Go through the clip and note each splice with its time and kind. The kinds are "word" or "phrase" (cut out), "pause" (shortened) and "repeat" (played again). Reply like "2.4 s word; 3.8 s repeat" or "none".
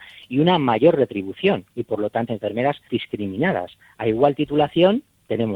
2.3 s word; 2.9 s word

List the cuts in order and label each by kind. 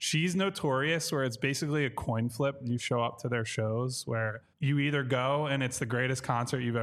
4.5 s pause

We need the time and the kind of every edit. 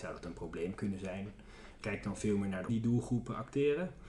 1.8 s word; 2.7 s phrase

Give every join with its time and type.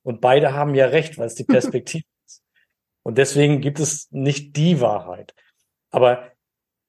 none

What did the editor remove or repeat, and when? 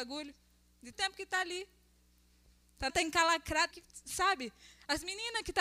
0.9 s word; 2.9 s word; 3.7 s word

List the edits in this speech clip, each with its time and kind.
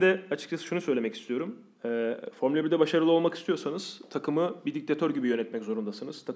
none

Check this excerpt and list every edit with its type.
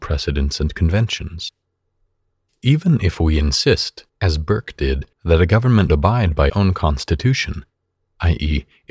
4.1 s pause; 5.1 s pause; 5.9 s word; 6.5 s word

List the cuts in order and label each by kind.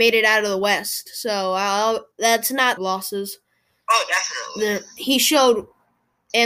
2.1 s pause; 2.8 s phrase

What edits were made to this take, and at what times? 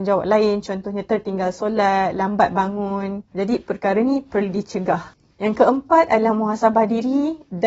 5.3 s pause

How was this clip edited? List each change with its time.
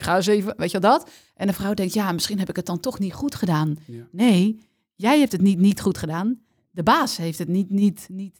none

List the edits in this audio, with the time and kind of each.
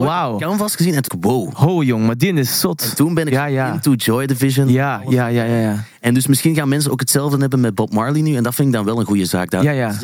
1.1 s word

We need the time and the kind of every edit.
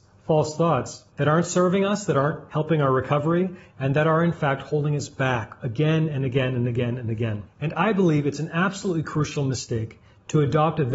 none

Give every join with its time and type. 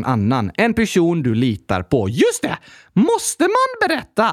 none

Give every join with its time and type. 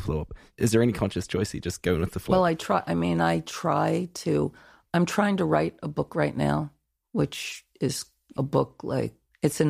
8.4 s phrase

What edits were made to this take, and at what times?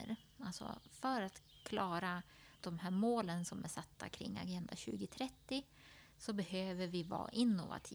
2.5 s pause

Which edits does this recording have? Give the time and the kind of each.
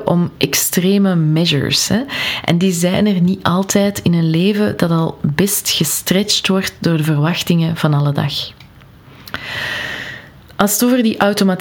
none

